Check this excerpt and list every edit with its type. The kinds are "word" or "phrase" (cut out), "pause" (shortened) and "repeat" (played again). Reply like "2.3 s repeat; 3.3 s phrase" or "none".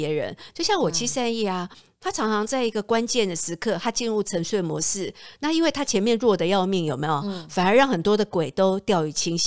none